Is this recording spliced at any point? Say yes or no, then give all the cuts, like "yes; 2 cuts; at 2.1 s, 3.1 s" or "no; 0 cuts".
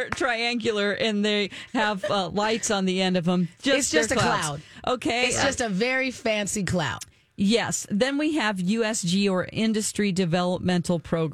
no; 0 cuts